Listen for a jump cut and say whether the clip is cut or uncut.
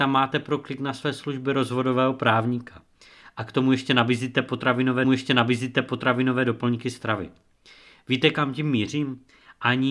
cut